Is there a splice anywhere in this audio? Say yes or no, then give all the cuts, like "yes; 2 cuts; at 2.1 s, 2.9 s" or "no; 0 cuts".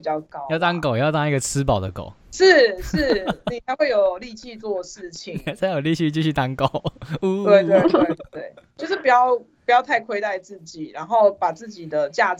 yes; 2 cuts; at 2.2 s, 8.3 s